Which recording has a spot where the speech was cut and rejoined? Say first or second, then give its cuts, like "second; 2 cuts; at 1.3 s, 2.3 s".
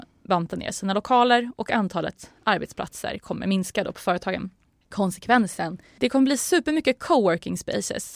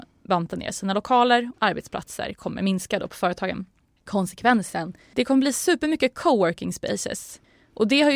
second; 1 cut; at 1.5 s